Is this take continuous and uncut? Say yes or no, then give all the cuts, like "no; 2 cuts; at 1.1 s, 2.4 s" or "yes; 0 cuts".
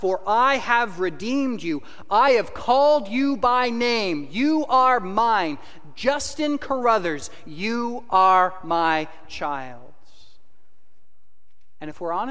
yes; 0 cuts